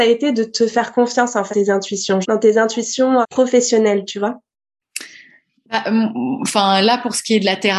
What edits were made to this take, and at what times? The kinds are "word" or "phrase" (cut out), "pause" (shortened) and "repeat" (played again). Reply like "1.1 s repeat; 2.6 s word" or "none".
1.5 s word; 2.2 s word; 3.2 s word